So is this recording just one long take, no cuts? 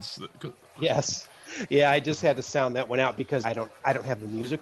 no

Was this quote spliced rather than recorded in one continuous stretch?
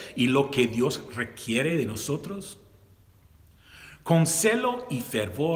no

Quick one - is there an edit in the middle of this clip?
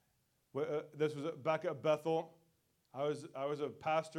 no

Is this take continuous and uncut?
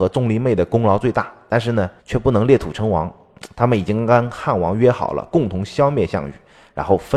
no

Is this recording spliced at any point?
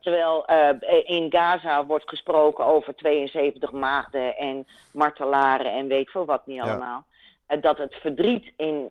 yes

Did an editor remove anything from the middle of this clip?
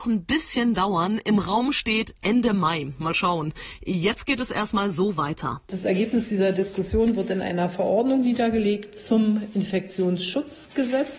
no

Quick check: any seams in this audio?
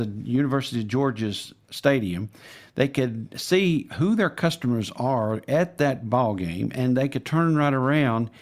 no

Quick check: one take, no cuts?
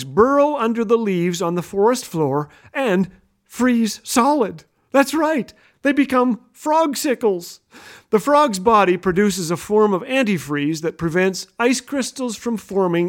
yes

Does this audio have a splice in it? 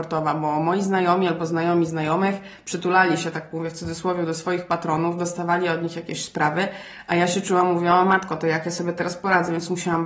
no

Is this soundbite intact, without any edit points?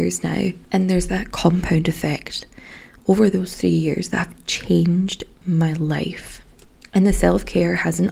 yes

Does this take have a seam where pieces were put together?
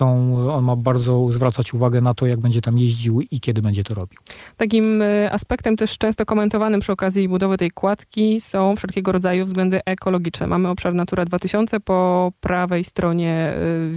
yes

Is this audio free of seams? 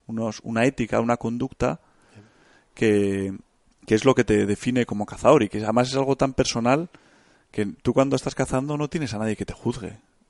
no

